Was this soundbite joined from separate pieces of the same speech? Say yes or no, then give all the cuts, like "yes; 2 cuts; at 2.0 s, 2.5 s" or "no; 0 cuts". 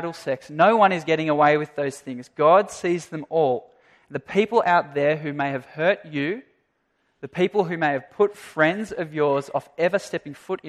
no; 0 cuts